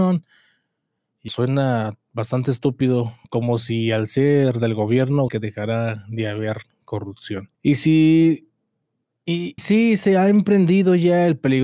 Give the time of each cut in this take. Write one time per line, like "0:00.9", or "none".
0:01.3
0:03.2
0:05.3
0:07.5
0:09.6